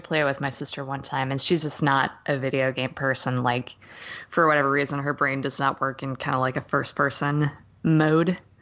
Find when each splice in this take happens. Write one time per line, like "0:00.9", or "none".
none